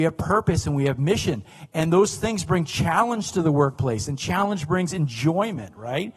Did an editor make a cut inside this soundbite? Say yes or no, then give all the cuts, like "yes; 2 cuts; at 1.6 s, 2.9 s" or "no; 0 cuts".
no; 0 cuts